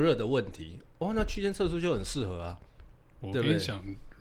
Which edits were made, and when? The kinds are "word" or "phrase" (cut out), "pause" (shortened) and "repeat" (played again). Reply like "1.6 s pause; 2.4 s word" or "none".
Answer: none